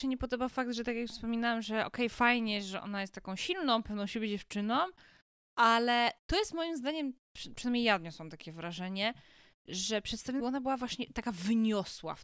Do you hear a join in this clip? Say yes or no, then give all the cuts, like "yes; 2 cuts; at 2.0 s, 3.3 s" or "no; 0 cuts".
yes; 1 cut; at 10.4 s